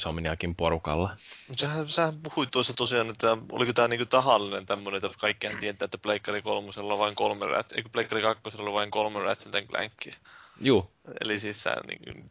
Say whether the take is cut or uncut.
uncut